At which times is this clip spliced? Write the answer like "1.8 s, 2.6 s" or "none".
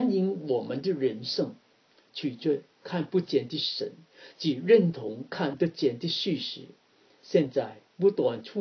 none